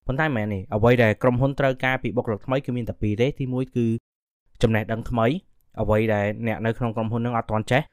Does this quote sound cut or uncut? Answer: uncut